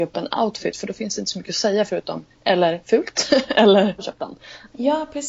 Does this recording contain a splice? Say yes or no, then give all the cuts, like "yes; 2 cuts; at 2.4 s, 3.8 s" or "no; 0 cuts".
yes; 2 cuts; at 2.3 s, 4.0 s